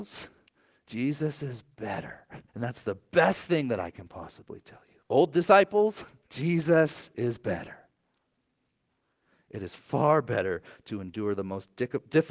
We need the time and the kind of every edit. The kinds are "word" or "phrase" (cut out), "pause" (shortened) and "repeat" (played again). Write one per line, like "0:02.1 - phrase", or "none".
0:02.5 - pause
0:05.0 - pause
0:06.2 - pause